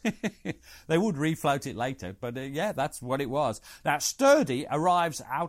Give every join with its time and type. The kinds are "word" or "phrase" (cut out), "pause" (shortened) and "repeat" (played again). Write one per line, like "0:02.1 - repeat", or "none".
none